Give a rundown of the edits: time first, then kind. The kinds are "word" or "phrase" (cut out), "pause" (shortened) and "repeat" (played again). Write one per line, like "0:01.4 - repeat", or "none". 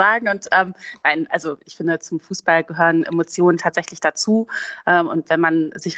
none